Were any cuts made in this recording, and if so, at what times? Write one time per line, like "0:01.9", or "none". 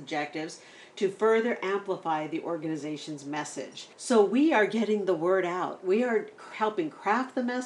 0:03.9